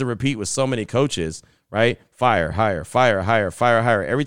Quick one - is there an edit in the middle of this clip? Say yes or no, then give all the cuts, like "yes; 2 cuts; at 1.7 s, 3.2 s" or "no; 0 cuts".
no; 0 cuts